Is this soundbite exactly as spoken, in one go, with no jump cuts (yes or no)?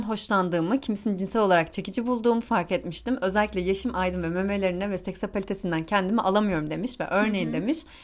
yes